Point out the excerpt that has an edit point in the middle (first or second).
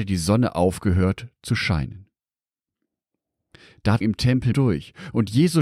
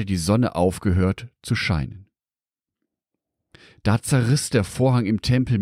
first